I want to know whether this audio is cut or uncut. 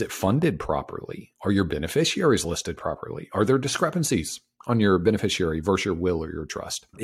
uncut